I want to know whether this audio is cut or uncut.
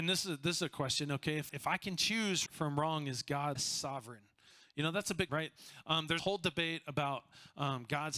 cut